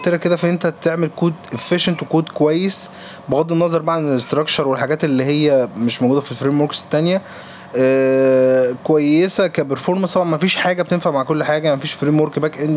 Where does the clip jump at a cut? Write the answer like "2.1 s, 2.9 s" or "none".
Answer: none